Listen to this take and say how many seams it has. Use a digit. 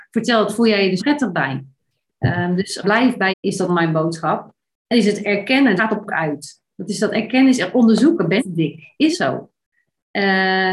9